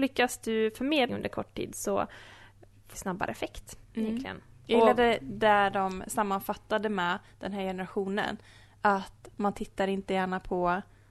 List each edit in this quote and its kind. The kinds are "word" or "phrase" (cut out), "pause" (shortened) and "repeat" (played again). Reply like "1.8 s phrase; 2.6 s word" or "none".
1.1 s word; 2.9 s phrase; 3.8 s pause